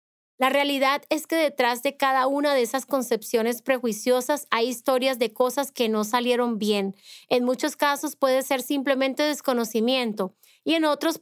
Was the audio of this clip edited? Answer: no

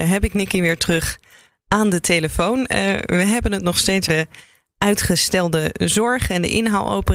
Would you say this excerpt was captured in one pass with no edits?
no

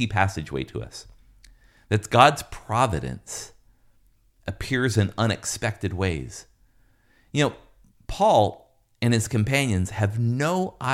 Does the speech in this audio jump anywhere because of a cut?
no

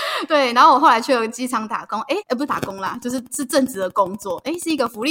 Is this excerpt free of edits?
no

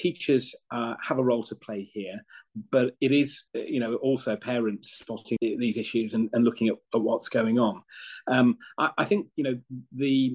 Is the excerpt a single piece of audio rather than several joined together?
no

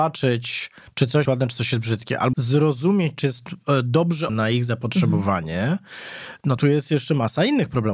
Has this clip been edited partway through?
yes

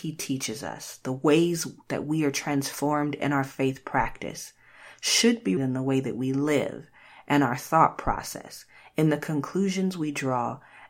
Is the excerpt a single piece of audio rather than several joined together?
no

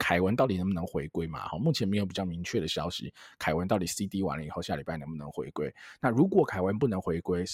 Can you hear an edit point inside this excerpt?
no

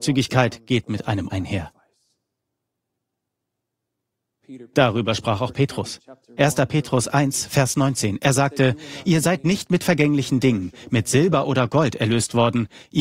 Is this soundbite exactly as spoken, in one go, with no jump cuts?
no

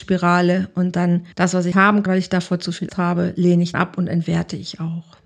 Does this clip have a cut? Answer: yes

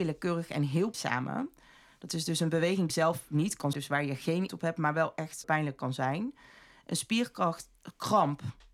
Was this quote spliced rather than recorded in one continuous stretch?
yes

